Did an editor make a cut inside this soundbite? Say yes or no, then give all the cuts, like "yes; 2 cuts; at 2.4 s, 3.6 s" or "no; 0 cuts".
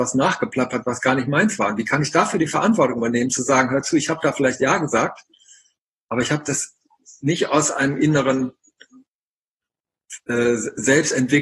no; 0 cuts